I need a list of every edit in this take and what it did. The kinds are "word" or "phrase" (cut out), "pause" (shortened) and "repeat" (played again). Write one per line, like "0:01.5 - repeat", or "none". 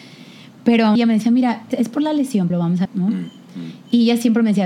0:01.0 - word
0:01.7 - word
0:02.5 - word
0:02.8 - word